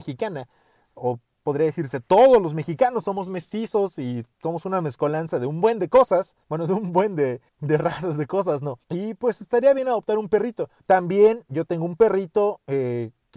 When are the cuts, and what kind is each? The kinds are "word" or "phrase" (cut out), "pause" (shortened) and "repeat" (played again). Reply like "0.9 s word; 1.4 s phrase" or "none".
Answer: 4.3 s pause; 6.4 s pause; 7.5 s pause; 8.8 s pause; 10.8 s pause